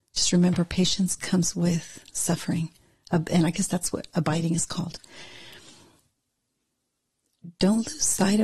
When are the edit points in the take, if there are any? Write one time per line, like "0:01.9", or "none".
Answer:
none